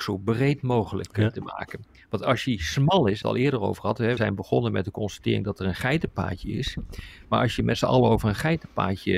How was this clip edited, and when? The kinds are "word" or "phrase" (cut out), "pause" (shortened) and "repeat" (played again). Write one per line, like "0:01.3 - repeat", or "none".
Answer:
0:03.2 - word
0:04.2 - word